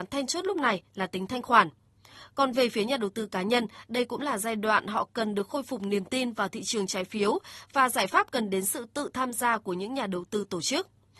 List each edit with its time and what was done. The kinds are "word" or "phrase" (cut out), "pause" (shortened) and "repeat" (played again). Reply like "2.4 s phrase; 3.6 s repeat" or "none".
none